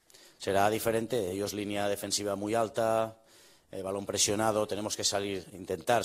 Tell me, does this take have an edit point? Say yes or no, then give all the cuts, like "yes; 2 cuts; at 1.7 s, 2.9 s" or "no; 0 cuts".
no; 0 cuts